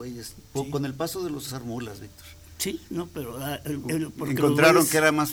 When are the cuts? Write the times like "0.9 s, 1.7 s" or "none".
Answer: 1.5 s

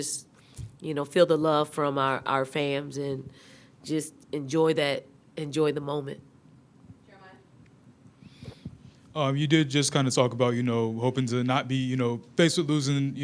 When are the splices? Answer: none

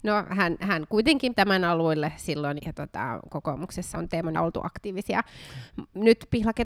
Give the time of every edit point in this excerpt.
1.4 s, 2.6 s, 3.9 s, 4.3 s

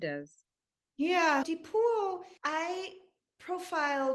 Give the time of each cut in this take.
1.4 s, 2.4 s

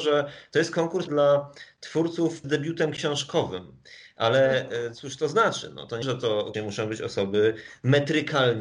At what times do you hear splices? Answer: 1.1 s, 2.4 s, 6.0 s, 6.5 s

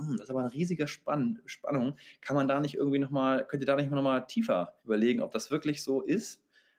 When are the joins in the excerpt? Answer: 4.8 s

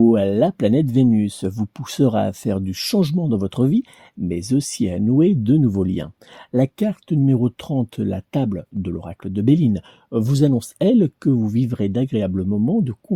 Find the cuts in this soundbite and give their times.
none

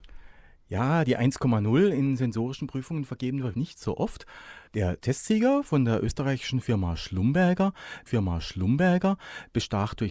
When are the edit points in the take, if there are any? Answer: 3.5 s, 4.7 s, 8.1 s

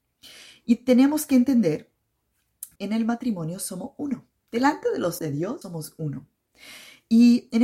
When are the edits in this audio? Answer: 2.8 s, 5.2 s, 5.6 s

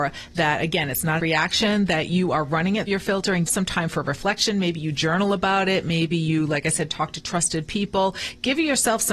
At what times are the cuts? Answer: 1.2 s, 2.9 s, 3.5 s

